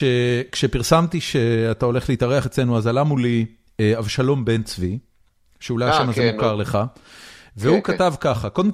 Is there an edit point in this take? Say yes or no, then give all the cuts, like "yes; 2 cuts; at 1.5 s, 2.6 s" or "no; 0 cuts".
no; 0 cuts